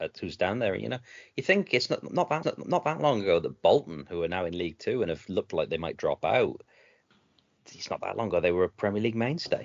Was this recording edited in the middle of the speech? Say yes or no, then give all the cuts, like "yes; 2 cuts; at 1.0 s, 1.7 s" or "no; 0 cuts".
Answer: yes; 1 cut; at 2.4 s